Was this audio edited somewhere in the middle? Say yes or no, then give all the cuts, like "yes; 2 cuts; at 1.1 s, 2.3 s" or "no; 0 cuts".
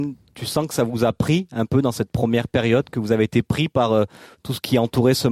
no; 0 cuts